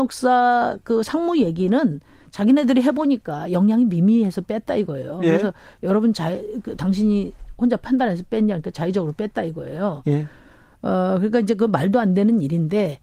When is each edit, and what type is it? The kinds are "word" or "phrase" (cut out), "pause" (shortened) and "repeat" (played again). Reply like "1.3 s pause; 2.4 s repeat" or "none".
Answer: none